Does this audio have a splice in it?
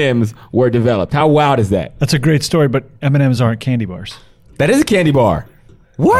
no; 0 cuts

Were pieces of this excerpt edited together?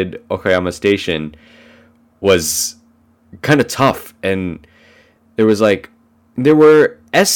no; 0 cuts

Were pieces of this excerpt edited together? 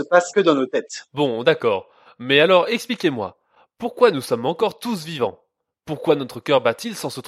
no; 0 cuts

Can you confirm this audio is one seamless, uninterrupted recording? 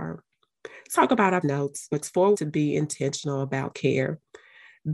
no; 5 cuts; at 0.9 s, 1.4 s, 1.9 s, 2.3 s, 3.7 s

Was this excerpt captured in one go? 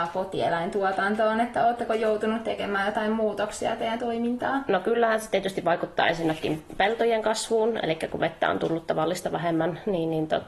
no; 1 cut; at 4.0 s

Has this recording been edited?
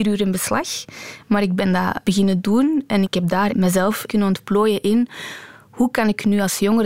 yes; 4 cuts; at 2.0 s, 3.0 s, 3.5 s, 4.1 s

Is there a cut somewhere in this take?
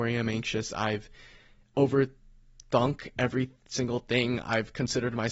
no; 0 cuts

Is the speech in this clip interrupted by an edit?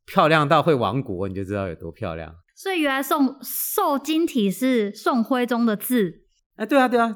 yes; 1 cut; at 2.4 s

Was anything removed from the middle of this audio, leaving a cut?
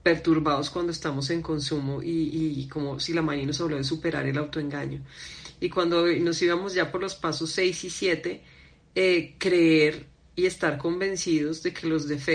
no; 0 cuts

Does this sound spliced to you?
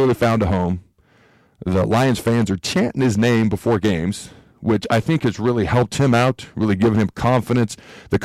no; 0 cuts

